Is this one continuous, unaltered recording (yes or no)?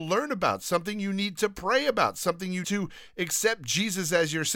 no